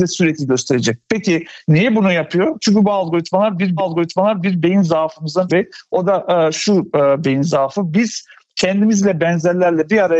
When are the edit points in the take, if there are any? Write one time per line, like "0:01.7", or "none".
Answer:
0:03.8
0:05.5